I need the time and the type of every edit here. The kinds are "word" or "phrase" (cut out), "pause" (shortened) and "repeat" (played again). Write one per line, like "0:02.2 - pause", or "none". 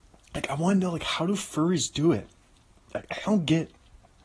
none